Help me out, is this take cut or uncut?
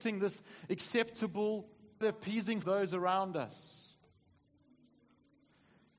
cut